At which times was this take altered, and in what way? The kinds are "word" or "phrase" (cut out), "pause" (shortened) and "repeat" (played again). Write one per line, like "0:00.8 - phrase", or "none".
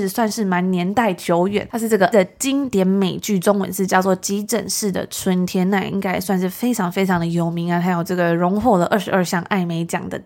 0:02.1 - word

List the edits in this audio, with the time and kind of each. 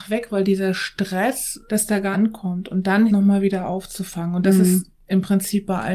0:01.7 - phrase
0:02.1 - phrase
0:03.1 - phrase

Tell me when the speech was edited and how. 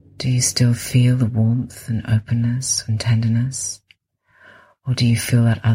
none

